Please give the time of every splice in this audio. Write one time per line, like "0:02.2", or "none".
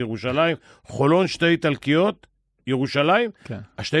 none